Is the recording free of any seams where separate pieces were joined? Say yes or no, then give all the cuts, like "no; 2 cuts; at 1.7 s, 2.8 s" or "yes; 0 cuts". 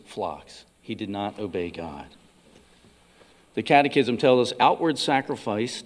yes; 0 cuts